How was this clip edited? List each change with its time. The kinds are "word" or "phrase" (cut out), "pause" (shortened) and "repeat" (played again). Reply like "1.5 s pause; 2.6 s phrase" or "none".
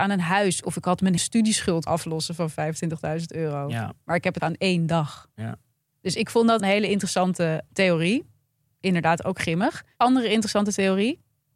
1.2 s word; 1.9 s word; 4.4 s word; 6.6 s word; 7.7 s word